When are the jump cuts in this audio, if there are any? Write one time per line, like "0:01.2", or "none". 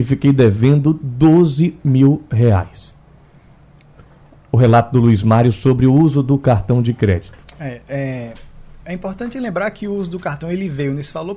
none